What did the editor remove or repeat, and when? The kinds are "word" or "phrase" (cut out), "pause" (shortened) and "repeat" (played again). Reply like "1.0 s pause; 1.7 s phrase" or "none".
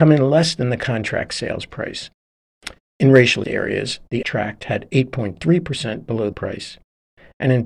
3.4 s word; 4.2 s word; 6.3 s word